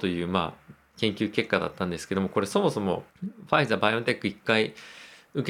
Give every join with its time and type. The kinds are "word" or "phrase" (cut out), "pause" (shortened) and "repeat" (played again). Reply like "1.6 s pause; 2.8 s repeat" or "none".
3.1 s pause